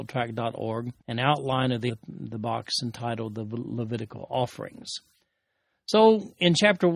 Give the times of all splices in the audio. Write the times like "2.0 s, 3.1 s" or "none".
1.0 s, 1.9 s